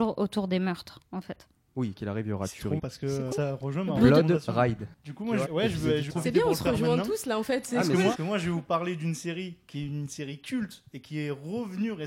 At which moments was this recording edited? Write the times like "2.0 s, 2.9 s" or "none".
2.0 s, 2.8 s, 3.3 s, 5.5 s, 6.1 s, 8.1 s